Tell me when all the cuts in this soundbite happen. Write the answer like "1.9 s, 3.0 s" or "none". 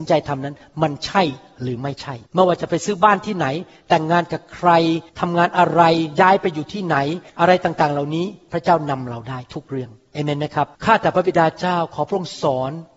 2.3 s, 5.1 s, 7.3 s, 10.7 s